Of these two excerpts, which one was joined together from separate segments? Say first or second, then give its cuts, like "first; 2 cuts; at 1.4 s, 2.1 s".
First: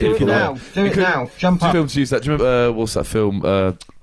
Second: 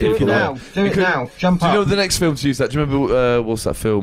first; 2 cuts; at 1.7 s, 2.4 s